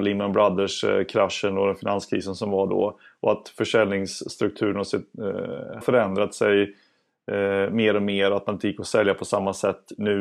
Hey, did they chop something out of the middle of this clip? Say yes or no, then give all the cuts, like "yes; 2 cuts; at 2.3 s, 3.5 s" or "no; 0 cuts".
yes; 1 cut; at 5.8 s